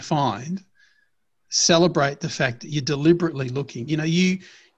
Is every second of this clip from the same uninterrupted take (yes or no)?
yes